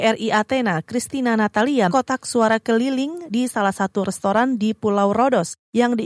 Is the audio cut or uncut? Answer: cut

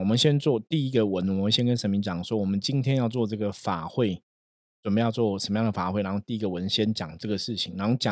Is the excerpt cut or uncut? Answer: cut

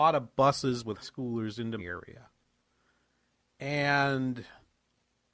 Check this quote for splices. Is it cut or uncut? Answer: cut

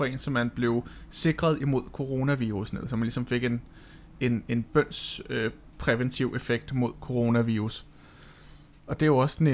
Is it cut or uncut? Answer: uncut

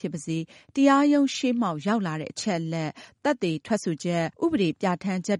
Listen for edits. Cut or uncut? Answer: cut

